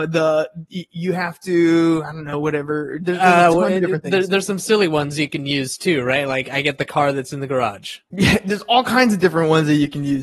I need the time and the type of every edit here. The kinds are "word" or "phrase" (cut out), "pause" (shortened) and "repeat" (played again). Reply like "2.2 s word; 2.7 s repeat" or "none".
none